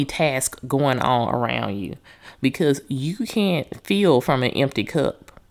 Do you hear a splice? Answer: no; 0 cuts

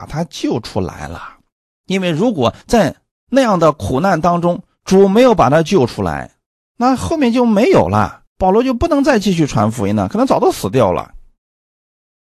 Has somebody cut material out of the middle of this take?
yes; 3 cuts; at 1.6 s, 2.6 s, 8.3 s

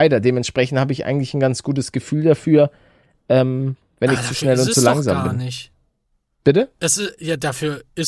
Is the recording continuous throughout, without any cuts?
yes; 0 cuts

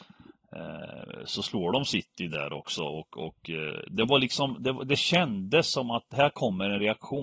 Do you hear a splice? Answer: no; 0 cuts

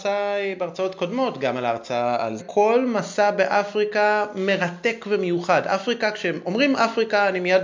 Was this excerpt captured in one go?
no; 1 cut; at 2.4 s

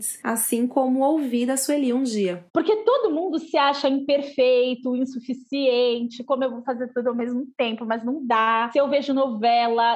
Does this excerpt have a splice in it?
yes; 1 cut; at 2.5 s

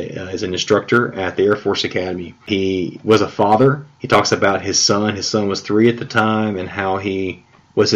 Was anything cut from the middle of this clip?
yes; 1 cut; at 3.9 s

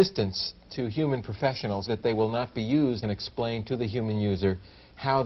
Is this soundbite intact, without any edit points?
no; 2 cuts; at 1.9 s, 3.0 s

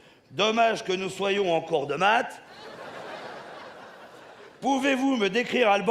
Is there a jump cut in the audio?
yes; 1 cut; at 4.5 s

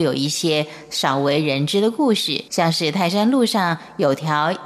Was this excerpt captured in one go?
no; 1 cut; at 2.5 s

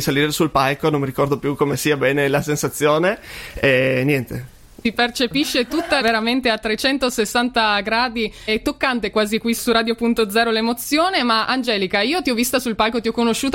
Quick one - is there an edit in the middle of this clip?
yes; 3 cuts; at 6.0 s, 8.5 s, 9.6 s

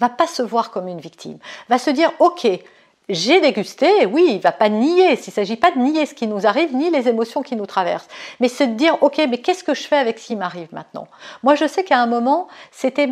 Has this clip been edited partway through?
no; 0 cuts

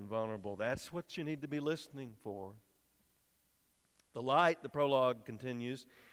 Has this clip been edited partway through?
no; 0 cuts

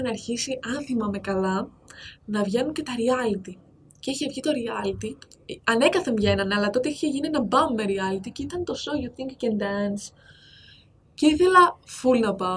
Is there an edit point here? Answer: no; 0 cuts

